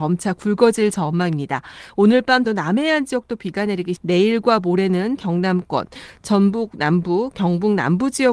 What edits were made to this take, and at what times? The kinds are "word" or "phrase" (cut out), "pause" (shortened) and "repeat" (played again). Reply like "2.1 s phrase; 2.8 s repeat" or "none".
2.5 s word; 4.0 s word; 5.2 s word